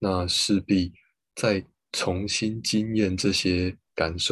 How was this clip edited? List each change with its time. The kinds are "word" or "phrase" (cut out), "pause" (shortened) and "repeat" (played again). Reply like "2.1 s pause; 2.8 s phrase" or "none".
none